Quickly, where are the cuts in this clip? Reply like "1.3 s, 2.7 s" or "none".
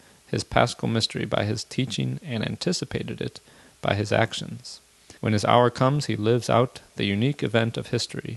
5.2 s